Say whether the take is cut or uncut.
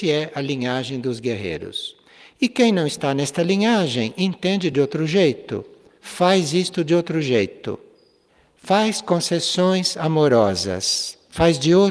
uncut